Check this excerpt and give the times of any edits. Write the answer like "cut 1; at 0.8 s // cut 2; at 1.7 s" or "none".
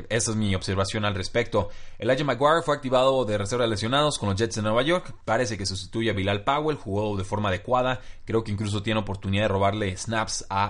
none